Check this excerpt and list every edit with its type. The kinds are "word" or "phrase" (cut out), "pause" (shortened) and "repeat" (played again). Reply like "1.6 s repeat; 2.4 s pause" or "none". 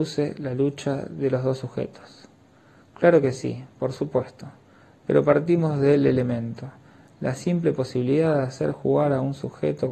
none

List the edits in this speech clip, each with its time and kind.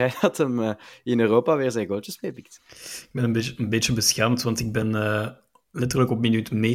none

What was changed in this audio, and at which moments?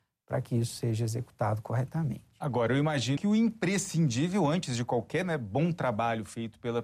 3.2 s word

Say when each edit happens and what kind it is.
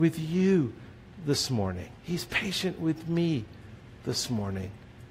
2.0 s pause

